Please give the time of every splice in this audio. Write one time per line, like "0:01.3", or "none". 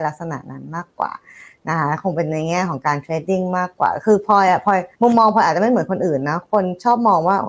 0:04.9

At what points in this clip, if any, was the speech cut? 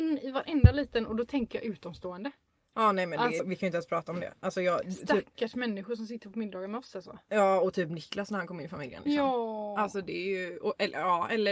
0:03.4

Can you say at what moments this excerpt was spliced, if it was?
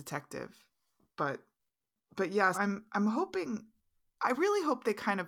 0:02.5
0:04.2

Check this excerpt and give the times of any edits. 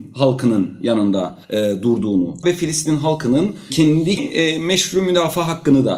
0:01.4
0:02.4
0:03.7
0:04.2

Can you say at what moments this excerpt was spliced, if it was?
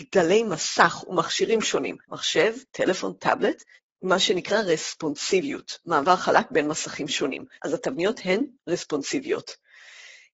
0:02.0
0:03.7
0:07.5

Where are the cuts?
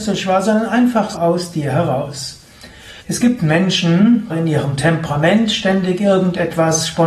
0:01.1
0:03.0
0:04.3

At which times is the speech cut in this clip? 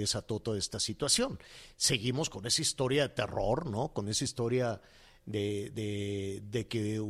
none

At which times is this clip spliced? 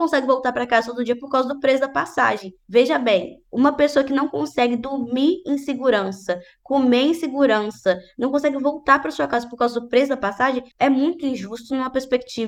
none

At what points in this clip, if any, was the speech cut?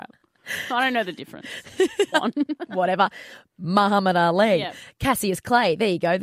0:02.1

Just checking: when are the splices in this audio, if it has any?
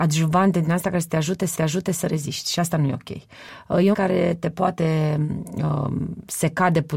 0:01.5
0:03.9

